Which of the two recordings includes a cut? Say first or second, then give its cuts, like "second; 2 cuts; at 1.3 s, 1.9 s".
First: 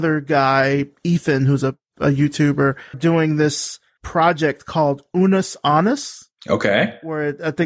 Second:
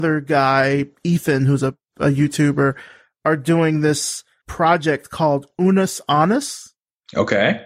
first; 2 cuts; at 2.9 s, 6.4 s